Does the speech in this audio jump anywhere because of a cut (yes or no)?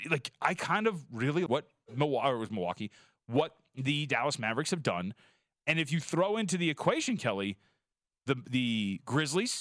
yes